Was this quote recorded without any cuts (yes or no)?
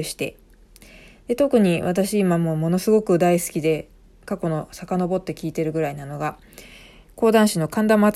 yes